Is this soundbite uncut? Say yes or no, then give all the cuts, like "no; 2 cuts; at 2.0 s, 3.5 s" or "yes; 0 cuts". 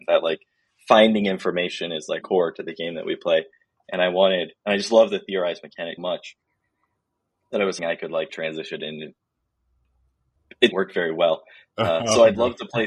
no; 5 cuts; at 2.2 s, 6.0 s, 7.8 s, 8.3 s, 10.7 s